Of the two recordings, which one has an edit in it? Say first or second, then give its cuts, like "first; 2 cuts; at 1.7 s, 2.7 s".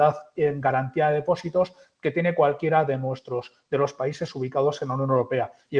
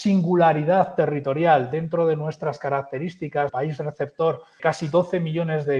second; 2 cuts; at 3.5 s, 4.6 s